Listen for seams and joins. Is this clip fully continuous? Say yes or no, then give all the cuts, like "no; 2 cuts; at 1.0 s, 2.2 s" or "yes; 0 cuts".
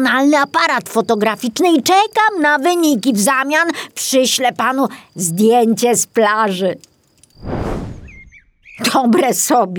yes; 0 cuts